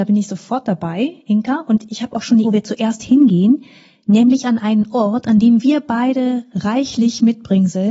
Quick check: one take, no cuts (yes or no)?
no